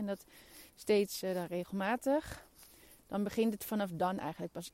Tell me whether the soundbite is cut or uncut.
uncut